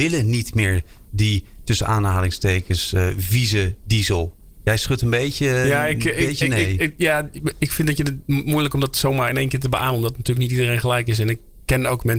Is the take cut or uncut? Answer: uncut